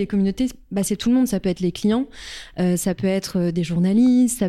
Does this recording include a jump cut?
no; 0 cuts

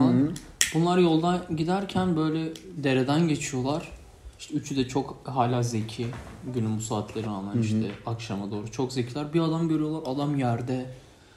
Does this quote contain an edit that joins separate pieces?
yes; 3 cuts; at 2.8 s, 4.3 s, 7.2 s

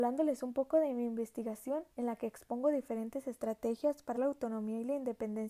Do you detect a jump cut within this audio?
yes; 2 cuts; at 1.9 s, 4.1 s

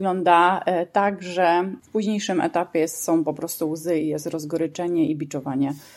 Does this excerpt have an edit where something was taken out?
no; 0 cuts

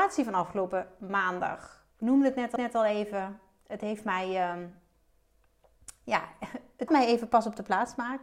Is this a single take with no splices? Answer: no; 3 cuts; at 1.9 s, 2.6 s, 6.9 s

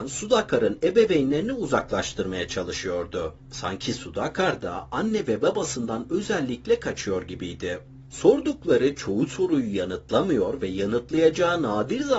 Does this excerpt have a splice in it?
no; 0 cuts

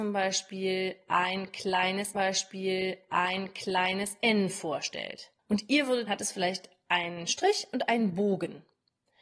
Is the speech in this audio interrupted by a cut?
yes; 3 cuts; at 2.1 s, 5.4 s, 6.1 s

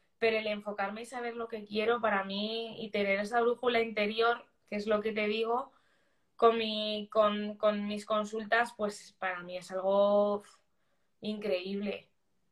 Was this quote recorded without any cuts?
yes; 0 cuts

